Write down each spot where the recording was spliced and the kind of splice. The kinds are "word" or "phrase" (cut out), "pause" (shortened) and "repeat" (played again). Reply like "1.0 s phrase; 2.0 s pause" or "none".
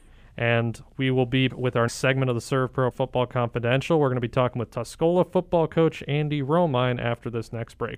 1.5 s word; 1.9 s word; 2.9 s word